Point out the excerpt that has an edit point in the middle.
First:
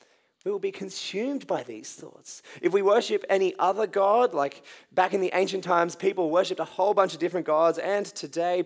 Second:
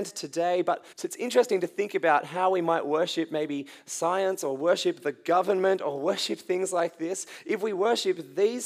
second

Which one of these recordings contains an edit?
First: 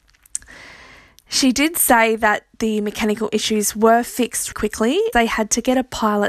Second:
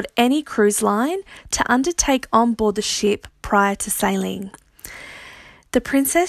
first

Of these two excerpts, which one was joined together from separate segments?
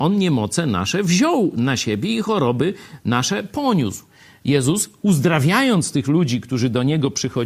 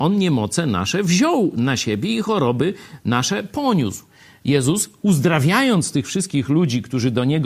first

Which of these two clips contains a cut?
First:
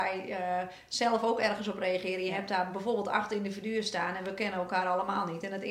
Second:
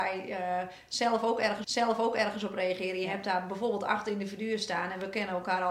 second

